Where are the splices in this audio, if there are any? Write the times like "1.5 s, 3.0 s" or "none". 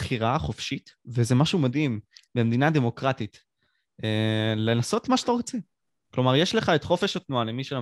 none